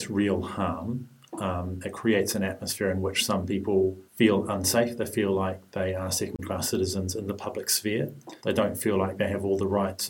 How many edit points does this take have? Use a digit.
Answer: 2